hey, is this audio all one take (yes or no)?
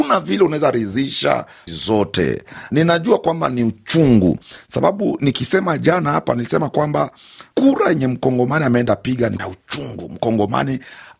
no